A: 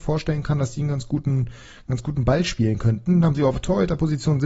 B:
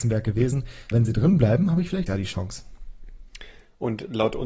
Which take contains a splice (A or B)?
B